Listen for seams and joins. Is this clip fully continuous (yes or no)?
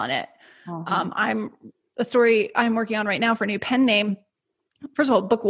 yes